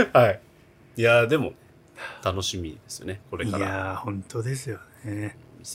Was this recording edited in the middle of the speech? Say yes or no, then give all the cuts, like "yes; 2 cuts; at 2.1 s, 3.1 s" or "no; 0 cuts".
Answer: yes; 1 cut; at 3.2 s